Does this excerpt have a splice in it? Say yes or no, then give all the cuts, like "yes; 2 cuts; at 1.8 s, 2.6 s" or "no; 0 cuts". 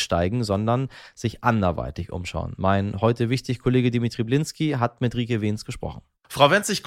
no; 0 cuts